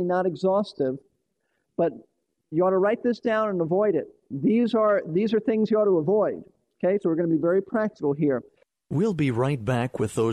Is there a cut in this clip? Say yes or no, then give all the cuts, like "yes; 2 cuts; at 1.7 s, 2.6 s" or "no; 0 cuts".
no; 0 cuts